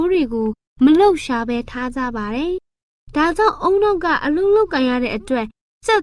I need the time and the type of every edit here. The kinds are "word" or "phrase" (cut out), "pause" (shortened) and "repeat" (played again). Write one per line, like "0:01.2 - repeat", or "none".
0:02.6 - pause

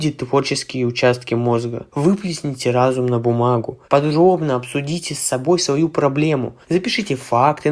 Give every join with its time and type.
0:01.9 - pause
0:03.8 - pause
0:06.6 - pause

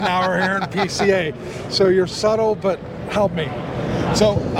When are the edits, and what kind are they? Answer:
none

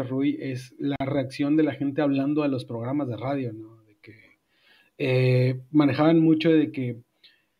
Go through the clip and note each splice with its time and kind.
none

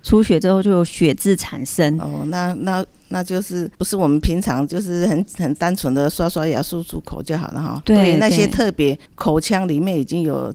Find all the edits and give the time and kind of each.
0:03.7 - pause
0:09.1 - pause

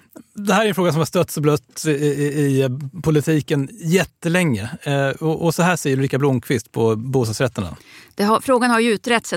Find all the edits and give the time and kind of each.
none

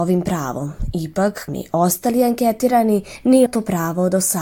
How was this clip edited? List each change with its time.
0:01.5 - word
0:03.5 - word

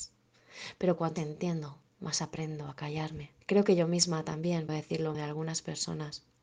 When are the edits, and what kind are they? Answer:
0:01.2 - word
0:01.9 - pause
0:03.4 - pause
0:04.7 - word
0:05.1 - word

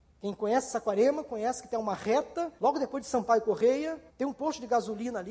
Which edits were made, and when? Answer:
0:02.6 - pause
0:04.1 - pause

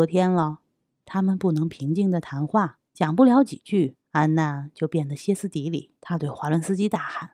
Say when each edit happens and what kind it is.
0:02.9 - pause
0:04.0 - pause
0:06.0 - pause

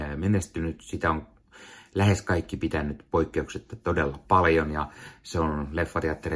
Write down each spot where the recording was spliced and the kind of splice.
none

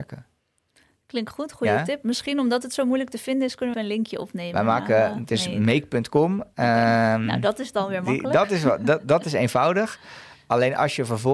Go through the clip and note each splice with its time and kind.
0:03.7 - word

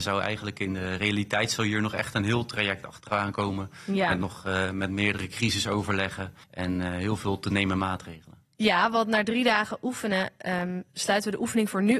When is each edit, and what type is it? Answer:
0:06.4 - pause

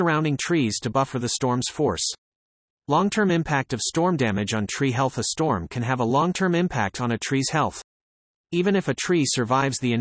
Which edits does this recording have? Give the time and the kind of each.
none

